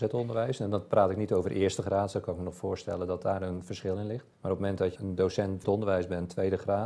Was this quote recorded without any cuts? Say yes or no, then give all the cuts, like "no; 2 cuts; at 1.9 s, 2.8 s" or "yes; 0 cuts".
no; 3 cuts; at 4.3 s, 5.0 s, 5.6 s